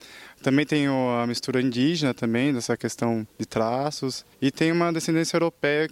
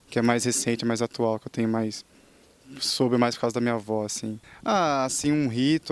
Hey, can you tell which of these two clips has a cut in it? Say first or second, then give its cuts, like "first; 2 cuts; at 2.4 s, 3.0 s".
first; 2 cuts; at 3.3 s, 4.3 s